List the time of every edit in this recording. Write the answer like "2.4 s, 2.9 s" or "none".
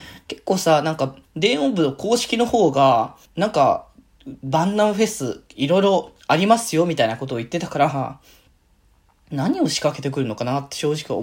1.2 s, 3.2 s, 6.2 s

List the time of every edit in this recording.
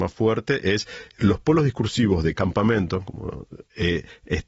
1.1 s, 2.4 s

